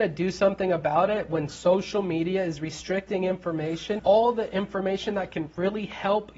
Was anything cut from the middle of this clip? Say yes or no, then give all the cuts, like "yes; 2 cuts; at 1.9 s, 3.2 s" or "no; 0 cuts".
yes; 1 cut; at 4.0 s